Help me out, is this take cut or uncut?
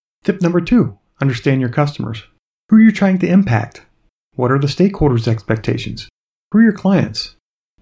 uncut